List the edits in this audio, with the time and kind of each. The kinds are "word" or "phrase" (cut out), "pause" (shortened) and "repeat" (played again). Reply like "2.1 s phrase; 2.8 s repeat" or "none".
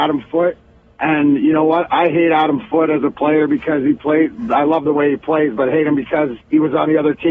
6.4 s pause